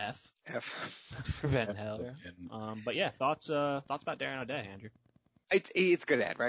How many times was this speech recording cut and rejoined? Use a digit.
0